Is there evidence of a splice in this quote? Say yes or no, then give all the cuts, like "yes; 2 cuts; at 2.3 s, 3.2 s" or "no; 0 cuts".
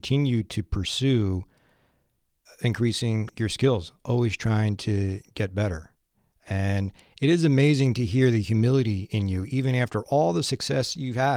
no; 0 cuts